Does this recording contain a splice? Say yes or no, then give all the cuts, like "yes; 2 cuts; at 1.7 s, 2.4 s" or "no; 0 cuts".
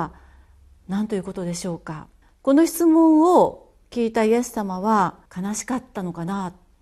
yes; 2 cuts; at 2.2 s, 5.3 s